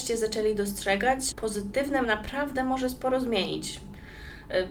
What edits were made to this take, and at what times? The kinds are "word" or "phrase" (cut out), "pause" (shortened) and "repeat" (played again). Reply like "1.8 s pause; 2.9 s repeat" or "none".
1.3 s word; 2.0 s word